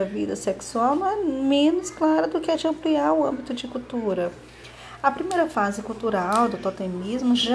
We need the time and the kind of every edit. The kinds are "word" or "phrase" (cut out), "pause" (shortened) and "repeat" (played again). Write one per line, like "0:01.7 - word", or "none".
none